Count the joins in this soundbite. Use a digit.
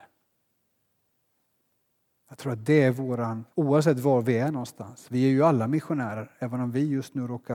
1